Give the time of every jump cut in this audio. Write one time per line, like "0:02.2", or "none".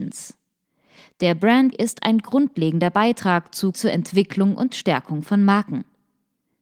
0:01.7
0:03.7